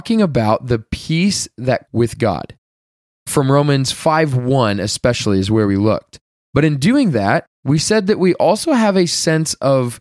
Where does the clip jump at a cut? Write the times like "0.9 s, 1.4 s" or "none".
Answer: 1.9 s